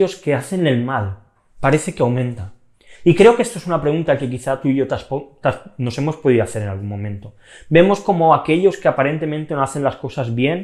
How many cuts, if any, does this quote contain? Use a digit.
0